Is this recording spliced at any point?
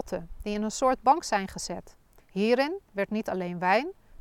yes; 1 cut; at 2.2 s

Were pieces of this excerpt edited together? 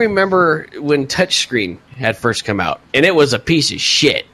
yes; 1 cut; at 1.9 s

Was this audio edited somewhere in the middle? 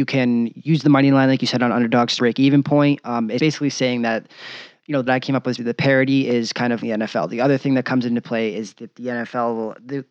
yes; 5 cuts; at 2.2 s, 3.4 s, 5.1 s, 5.6 s, 6.8 s

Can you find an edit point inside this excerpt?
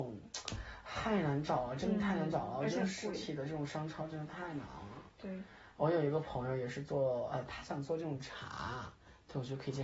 no; 0 cuts

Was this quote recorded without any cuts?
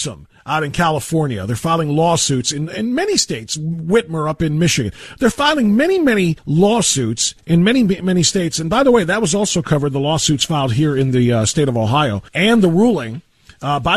no; 2 cuts; at 6.4 s, 12.3 s

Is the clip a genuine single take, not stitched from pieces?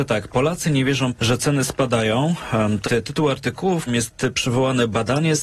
no; 3 cuts; at 1.1 s, 2.8 s, 3.9 s

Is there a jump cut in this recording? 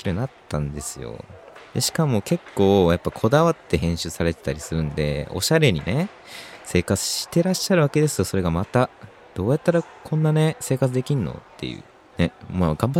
no; 0 cuts

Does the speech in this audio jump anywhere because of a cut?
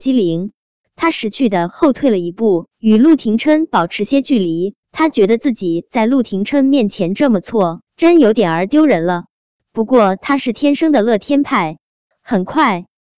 yes; 3 cuts; at 2.7 s, 4.8 s, 7.9 s

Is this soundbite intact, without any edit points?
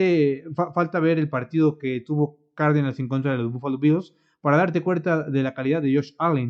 yes; 0 cuts

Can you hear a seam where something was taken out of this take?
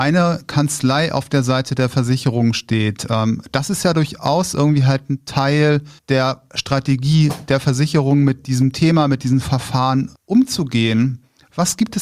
yes; 2 cuts; at 6.0 s, 10.2 s

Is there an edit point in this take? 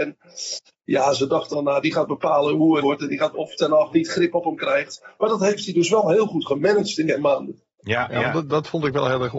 yes; 5 cuts; at 1.5 s, 2.8 s, 3.3 s, 3.9 s, 7.1 s

